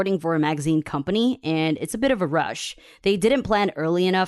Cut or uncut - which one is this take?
uncut